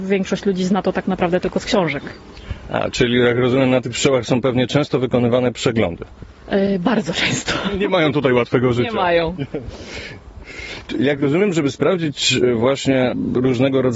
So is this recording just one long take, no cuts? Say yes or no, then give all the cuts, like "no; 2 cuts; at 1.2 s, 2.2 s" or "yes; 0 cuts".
yes; 0 cuts